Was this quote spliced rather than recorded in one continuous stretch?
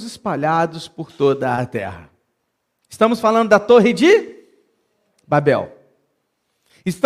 no; 0 cuts

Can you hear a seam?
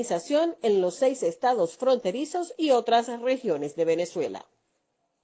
no; 0 cuts

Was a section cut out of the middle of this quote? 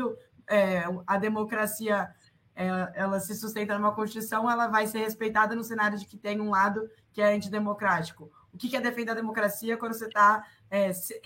no; 0 cuts

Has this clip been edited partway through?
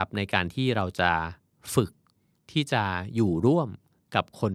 no; 0 cuts

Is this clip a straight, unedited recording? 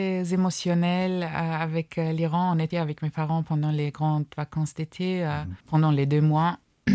no; 2 cuts; at 2.7 s, 5.6 s

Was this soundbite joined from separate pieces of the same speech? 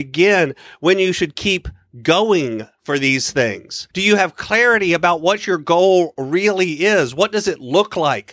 yes; 1 cut; at 3.9 s

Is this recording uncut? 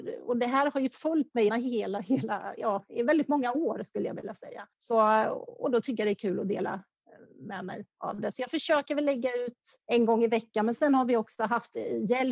no; 4 cuts; at 1.5 s, 4.7 s, 7.9 s, 9.8 s

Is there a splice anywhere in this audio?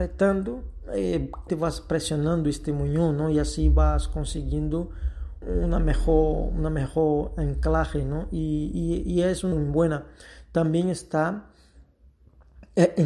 yes; 3 cuts; at 1.5 s, 5.4 s, 9.5 s

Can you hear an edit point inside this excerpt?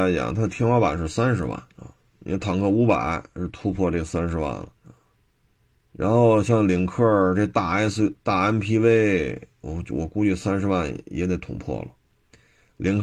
yes; 3 cuts; at 1.7 s, 4.8 s, 9.5 s

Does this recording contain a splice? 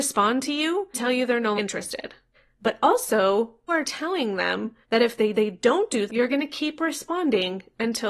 yes; 7 cuts; at 0.9 s, 1.6 s, 2.3 s, 3.7 s, 4.8 s, 5.3 s, 6.1 s

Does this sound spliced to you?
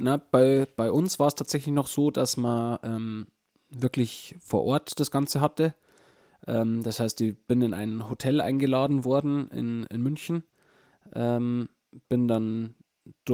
no; 0 cuts

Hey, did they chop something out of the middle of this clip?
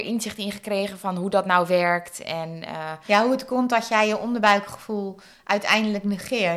no; 0 cuts

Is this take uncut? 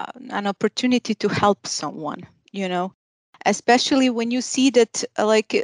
yes; 0 cuts

